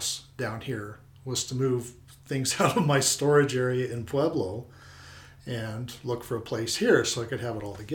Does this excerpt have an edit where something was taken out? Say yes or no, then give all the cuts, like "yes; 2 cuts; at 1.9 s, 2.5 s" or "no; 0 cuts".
no; 0 cuts